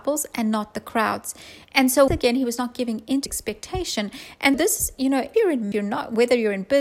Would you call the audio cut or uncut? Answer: cut